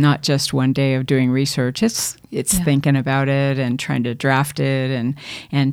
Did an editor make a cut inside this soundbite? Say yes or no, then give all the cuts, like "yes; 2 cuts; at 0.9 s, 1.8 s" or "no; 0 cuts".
no; 0 cuts